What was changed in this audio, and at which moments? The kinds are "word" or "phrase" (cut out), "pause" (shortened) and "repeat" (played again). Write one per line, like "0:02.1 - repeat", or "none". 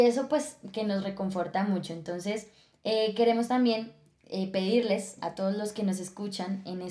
none